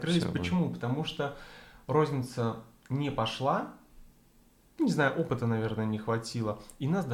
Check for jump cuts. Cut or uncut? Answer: uncut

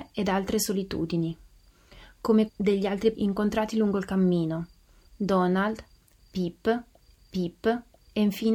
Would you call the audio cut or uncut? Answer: cut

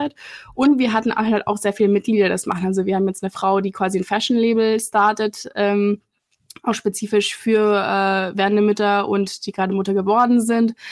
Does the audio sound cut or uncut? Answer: uncut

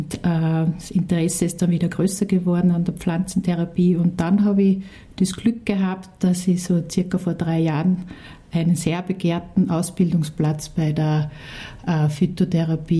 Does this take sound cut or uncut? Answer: uncut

